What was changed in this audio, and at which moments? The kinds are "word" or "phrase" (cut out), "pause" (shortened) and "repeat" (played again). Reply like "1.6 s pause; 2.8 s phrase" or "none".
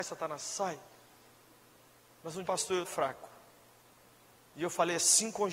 2.4 s word; 2.8 s word